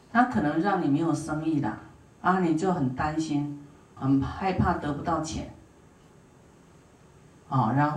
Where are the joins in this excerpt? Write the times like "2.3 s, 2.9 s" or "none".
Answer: 4.0 s